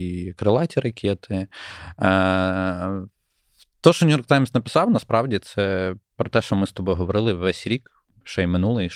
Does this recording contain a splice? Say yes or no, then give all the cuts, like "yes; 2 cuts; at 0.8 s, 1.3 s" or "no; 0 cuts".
no; 0 cuts